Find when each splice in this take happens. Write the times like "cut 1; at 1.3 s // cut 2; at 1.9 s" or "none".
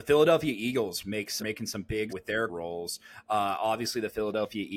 cut 1; at 1.4 s // cut 2; at 2.1 s // cut 3; at 2.5 s